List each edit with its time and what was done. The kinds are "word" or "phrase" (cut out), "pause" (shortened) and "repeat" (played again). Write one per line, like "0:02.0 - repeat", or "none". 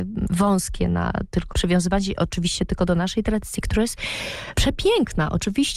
0:01.5 - word